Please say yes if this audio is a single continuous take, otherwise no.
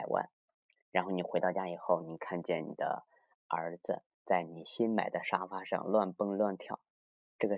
no